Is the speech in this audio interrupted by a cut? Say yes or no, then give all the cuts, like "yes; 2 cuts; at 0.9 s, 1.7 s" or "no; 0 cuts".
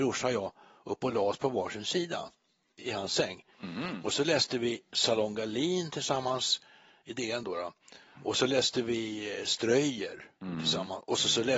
no; 0 cuts